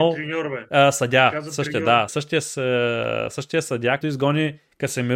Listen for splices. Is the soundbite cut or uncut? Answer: cut